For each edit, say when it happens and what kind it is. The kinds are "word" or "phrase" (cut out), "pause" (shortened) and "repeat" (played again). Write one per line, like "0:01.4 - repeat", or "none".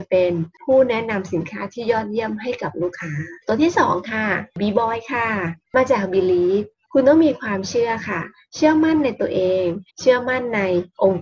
0:03.4 - pause
0:09.9 - pause

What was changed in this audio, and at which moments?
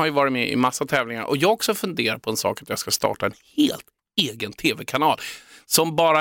none

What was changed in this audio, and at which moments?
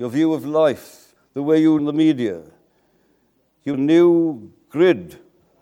0:01.2 - pause
0:01.8 - phrase
0:03.7 - phrase

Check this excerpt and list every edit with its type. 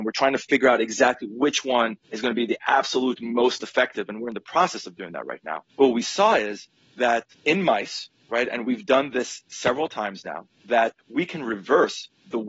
none

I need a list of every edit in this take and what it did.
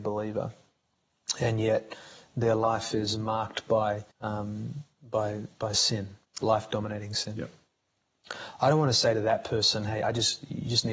0:04.1 - pause
0:06.2 - pause

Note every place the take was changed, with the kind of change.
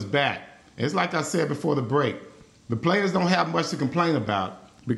none

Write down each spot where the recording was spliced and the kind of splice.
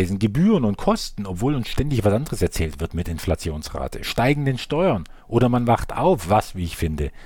none

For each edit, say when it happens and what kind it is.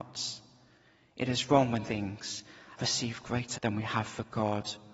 0:01.9 - word
0:02.8 - word
0:03.5 - word

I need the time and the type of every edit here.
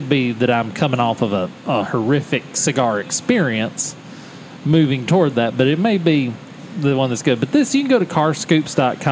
none

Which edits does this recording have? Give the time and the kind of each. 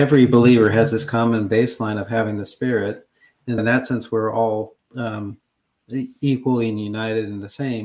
0:03.6 - word
0:04.9 - pause

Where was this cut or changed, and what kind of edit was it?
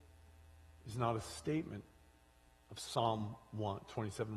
none

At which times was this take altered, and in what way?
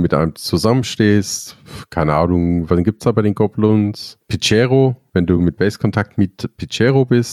none

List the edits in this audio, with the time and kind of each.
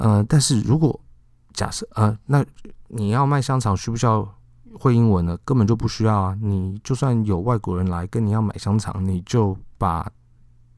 none

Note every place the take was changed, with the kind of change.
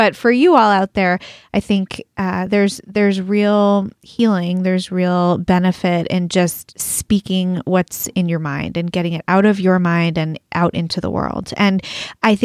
none

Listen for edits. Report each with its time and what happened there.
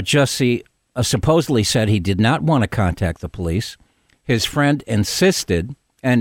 none

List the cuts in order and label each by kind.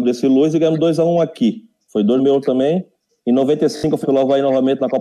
0:02.2 - word
0:03.1 - pause
0:04.0 - word

